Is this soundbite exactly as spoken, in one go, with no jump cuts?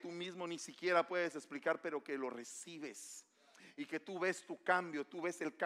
yes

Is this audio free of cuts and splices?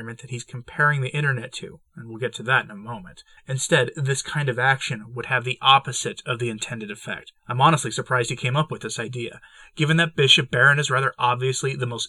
no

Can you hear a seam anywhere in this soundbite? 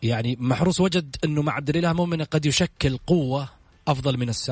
no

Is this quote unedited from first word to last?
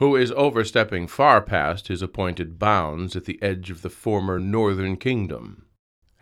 yes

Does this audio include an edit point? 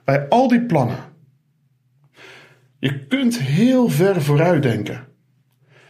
no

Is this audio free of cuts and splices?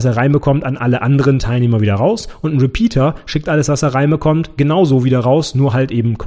yes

